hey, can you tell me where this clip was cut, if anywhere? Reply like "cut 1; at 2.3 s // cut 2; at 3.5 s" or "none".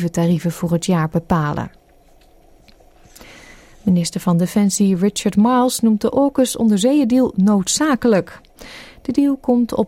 none